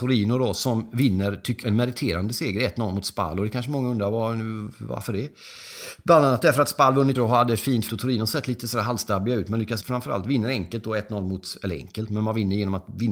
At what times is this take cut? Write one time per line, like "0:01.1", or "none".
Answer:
0:01.6
0:07.1
0:07.9
0:09.8

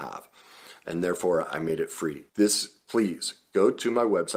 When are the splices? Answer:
0:02.3

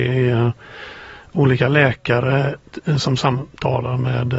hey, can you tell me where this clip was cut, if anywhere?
none

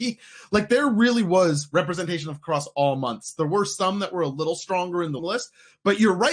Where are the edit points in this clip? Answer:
0:05.2

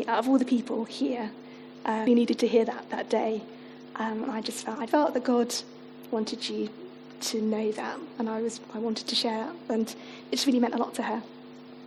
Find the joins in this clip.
0:02.1
0:04.9

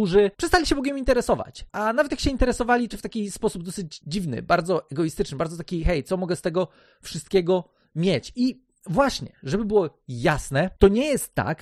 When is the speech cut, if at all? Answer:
0:02.9

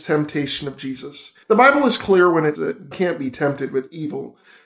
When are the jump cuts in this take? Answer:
0:01.4
0:02.6
0:02.9

